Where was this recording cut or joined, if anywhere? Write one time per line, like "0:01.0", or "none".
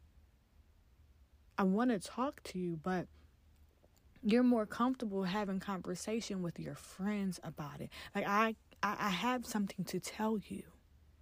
none

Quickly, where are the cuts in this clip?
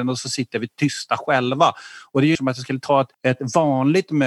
0:02.3
0:03.1

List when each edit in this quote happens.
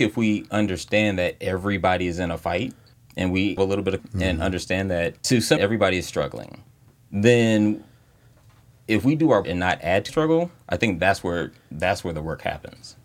0:02.9
0:03.6
0:04.0
0:05.2
0:05.6
0:06.9
0:09.4
0:10.1

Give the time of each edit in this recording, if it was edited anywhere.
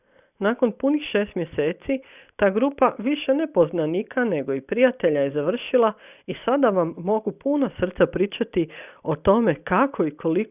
none

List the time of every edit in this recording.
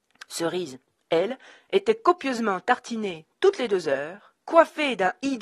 0:04.4

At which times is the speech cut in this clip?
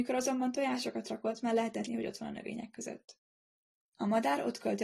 0:01.9

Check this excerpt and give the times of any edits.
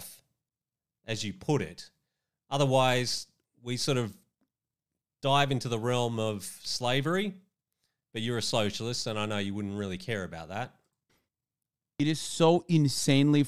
none

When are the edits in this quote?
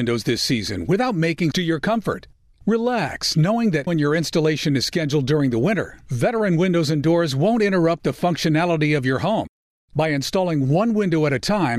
0:01.5
0:03.9

